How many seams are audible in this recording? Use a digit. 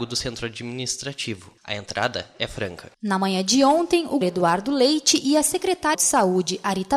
4